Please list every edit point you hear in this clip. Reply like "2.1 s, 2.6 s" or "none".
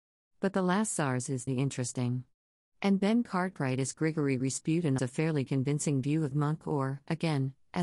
1.5 s, 5.0 s, 6.3 s